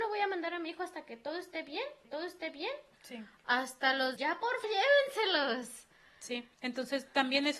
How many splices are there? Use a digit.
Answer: 4